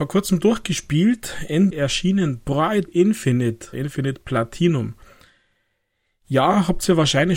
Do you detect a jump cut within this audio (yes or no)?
yes